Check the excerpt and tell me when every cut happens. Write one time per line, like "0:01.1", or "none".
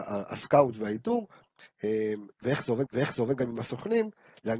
0:02.9